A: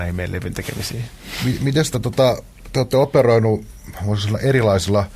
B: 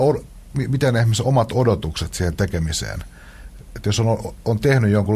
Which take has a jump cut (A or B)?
A